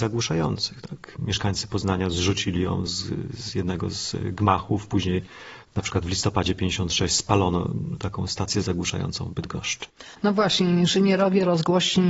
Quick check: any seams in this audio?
no; 0 cuts

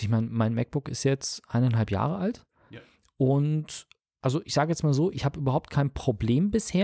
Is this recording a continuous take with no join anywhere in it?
yes; 0 cuts

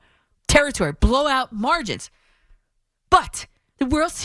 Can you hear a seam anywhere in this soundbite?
no; 0 cuts

